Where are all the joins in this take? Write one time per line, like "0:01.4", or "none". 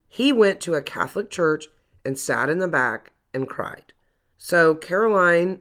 none